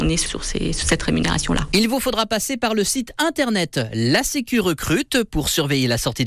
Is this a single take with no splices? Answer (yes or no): yes